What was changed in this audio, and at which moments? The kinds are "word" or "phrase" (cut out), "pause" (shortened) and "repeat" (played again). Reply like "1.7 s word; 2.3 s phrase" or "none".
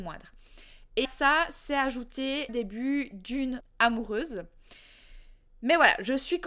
1.0 s word; 2.5 s word; 3.6 s word